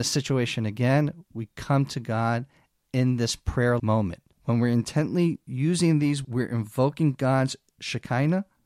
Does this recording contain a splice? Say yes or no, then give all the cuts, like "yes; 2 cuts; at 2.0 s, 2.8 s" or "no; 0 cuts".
yes; 2 cuts; at 3.8 s, 6.2 s